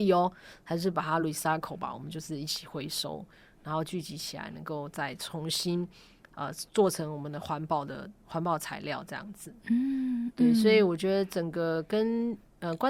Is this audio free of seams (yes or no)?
yes